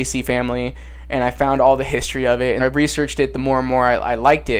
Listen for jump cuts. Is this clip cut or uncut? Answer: cut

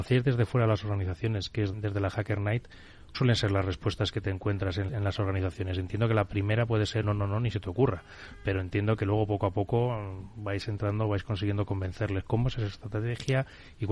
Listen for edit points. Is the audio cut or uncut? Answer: cut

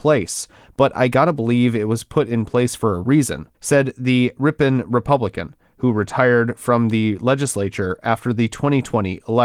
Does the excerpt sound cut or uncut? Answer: cut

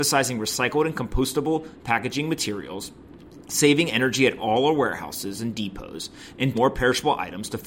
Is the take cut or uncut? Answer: cut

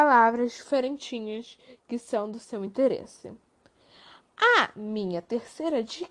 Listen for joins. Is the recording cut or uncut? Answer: uncut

